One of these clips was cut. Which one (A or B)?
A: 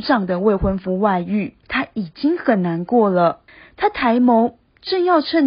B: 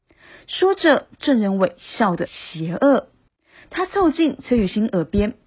A